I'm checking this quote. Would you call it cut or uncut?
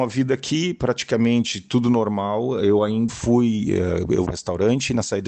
cut